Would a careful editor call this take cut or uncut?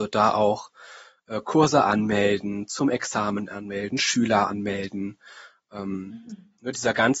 uncut